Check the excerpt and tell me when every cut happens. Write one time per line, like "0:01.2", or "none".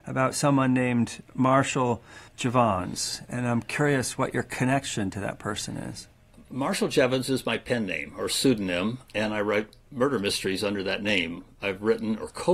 0:02.3
0:06.5
0:09.1